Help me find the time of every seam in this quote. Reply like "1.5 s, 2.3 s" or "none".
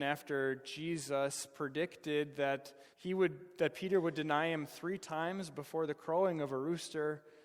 2.9 s

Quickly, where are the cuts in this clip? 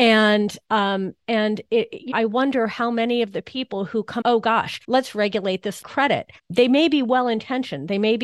2.1 s, 4.2 s, 4.8 s, 5.8 s, 6.4 s

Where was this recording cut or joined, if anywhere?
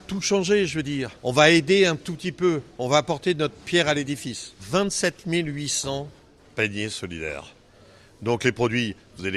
1.2 s, 4.6 s

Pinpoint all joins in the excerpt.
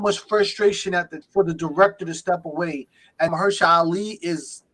1.2 s, 3.3 s

